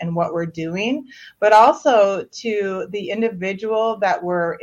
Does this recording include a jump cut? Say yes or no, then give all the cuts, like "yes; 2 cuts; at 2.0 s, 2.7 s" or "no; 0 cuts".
no; 0 cuts